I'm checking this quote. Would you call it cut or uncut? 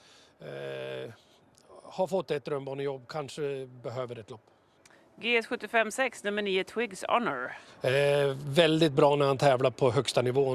uncut